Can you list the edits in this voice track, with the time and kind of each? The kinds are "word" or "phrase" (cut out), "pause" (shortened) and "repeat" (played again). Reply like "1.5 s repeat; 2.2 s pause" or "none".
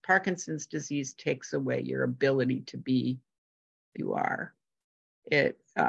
3.9 s phrase